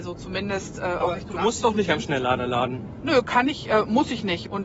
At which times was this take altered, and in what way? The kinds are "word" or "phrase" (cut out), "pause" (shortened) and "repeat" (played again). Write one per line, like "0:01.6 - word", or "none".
none